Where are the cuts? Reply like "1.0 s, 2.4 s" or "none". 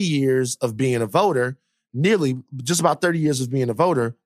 none